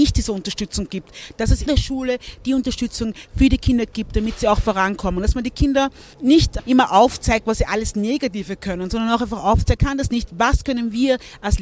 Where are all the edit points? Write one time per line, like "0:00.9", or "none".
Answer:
0:01.7
0:06.1
0:09.8